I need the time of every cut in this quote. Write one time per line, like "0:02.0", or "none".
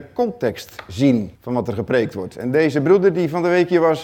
0:01.4